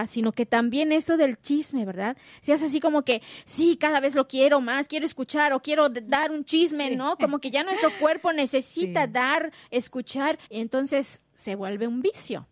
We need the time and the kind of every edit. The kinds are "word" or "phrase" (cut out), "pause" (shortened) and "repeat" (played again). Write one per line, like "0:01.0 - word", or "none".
0:10.5 - pause